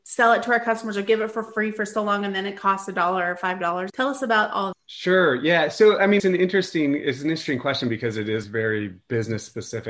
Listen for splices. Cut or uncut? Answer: cut